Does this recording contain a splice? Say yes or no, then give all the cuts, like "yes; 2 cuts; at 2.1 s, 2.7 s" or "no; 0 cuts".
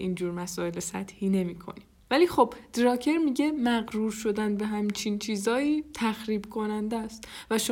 no; 0 cuts